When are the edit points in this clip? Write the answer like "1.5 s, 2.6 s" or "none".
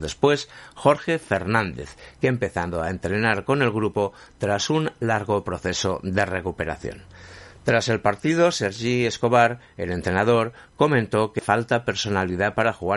11.4 s